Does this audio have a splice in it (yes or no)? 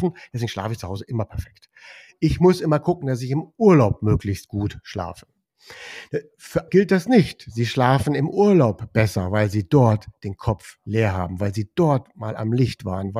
yes